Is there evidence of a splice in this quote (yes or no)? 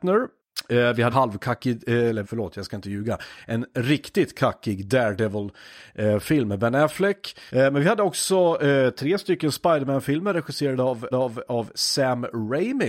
yes